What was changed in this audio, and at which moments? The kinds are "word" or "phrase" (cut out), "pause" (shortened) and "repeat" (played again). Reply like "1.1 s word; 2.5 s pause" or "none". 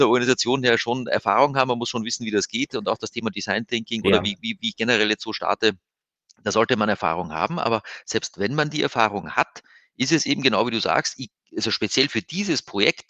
none